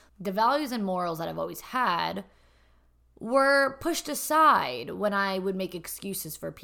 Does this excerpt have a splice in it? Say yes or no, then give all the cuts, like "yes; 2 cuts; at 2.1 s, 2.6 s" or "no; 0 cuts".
no; 0 cuts